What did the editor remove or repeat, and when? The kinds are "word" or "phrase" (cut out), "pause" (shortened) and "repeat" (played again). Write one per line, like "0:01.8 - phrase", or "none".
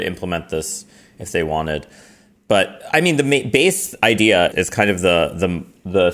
0:04.5 - word